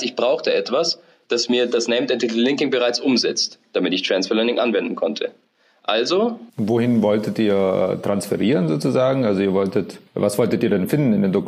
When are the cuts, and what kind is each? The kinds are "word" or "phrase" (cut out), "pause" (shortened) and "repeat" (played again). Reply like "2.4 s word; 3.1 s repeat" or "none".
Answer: 6.5 s pause; 10.1 s pause